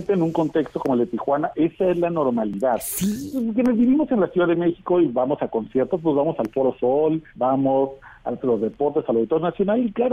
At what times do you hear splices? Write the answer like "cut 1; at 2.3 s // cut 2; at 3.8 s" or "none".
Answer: cut 1; at 7.3 s // cut 2; at 8.4 s